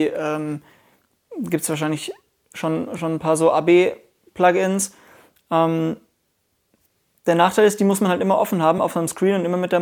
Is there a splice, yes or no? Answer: no